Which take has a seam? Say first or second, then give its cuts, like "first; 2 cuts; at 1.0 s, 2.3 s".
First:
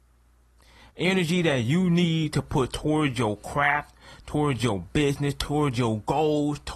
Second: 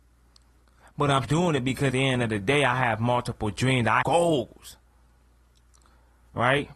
second; 3 cuts; at 1.2 s, 1.9 s, 4.0 s